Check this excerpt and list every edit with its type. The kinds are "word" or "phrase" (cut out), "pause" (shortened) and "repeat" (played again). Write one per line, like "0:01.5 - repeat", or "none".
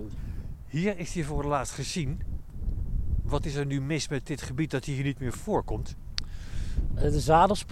none